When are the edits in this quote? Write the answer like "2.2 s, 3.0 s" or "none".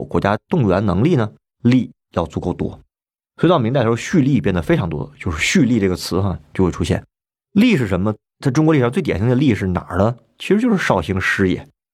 none